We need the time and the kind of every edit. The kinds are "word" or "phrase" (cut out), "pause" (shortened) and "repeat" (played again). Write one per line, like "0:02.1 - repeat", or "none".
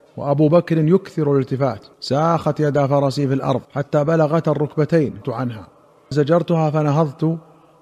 0:01.9 - pause
0:03.6 - pause
0:05.2 - word
0:06.1 - word